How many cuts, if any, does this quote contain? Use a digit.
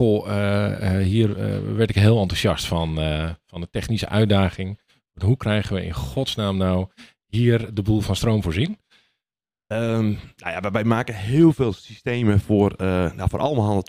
0